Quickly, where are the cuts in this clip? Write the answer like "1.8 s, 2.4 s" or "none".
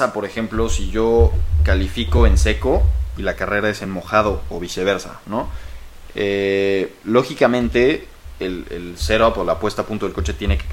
none